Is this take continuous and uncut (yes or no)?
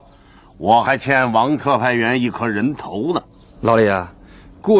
yes